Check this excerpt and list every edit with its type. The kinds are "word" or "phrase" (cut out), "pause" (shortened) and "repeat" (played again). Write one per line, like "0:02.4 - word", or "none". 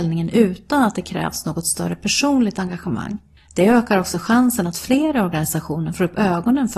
0:03.4 - pause